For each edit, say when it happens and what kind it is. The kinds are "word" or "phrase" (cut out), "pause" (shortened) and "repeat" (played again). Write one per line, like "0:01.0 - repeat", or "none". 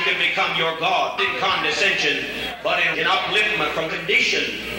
0:01.2 - word
0:02.9 - word
0:03.9 - word